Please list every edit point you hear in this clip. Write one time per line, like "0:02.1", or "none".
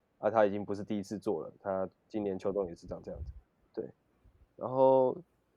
0:02.0
0:03.6